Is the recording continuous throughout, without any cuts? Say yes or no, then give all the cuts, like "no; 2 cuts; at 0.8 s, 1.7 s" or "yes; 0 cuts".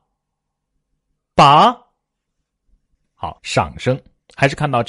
no; 1 cut; at 3.4 s